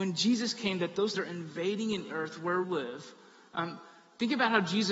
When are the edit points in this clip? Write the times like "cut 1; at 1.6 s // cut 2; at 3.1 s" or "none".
cut 1; at 1.1 s // cut 2; at 2.1 s // cut 3; at 2.6 s